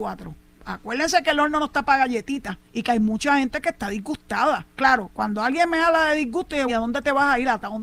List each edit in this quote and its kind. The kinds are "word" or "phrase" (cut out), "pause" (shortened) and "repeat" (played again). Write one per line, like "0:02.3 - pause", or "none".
0:02.6 - pause
0:04.7 - pause
0:06.7 - word